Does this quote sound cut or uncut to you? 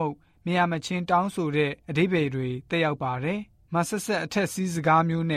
cut